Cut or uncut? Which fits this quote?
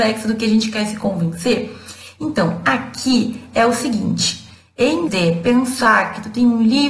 cut